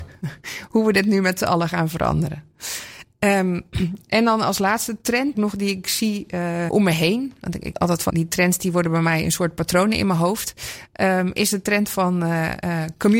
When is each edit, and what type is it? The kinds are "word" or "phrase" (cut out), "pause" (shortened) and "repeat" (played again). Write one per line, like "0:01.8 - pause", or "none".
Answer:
0:05.3 - word
0:06.7 - word
0:07.7 - word
0:08.1 - word